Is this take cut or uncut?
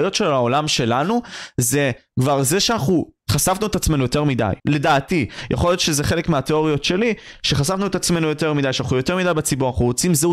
cut